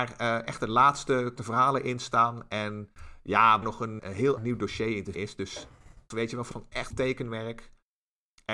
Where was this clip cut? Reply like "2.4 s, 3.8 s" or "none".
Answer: 1.4 s, 3.6 s, 4.0 s, 4.4 s, 5.1 s, 6.1 s, 6.5 s, 6.9 s

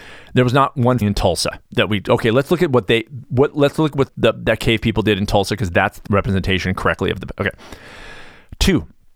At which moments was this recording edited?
1.0 s, 1.7 s, 4.1 s, 6.1 s

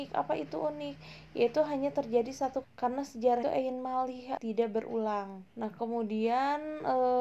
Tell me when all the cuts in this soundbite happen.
2.6 s, 3.4 s, 4.4 s, 5.5 s

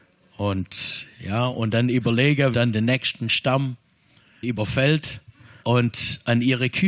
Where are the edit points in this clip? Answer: 2.5 s, 4.4 s, 5.6 s

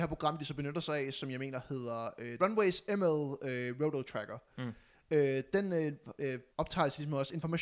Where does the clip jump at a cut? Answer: 2.4 s, 6.5 s

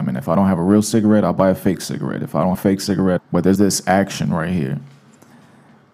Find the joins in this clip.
2.5 s, 3.2 s, 3.6 s

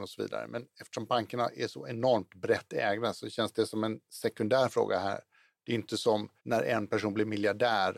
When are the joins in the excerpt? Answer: 6.4 s

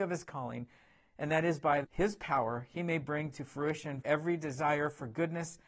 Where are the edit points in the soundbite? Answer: 1.8 s, 4.0 s

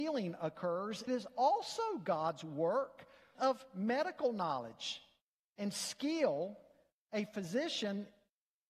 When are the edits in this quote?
1.1 s, 3.3 s

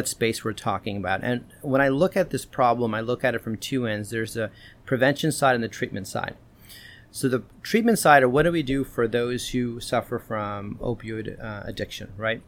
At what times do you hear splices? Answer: none

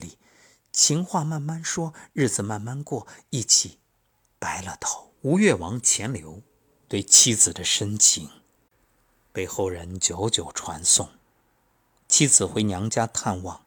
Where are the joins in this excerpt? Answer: 5.1 s

